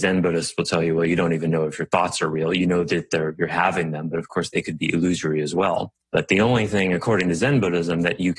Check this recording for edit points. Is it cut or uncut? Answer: cut